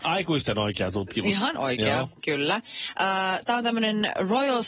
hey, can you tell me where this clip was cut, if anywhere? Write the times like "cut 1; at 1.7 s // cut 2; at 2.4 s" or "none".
cut 1; at 1.5 s